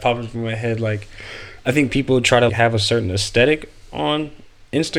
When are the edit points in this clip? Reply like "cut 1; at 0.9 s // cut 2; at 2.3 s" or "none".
cut 1; at 2.5 s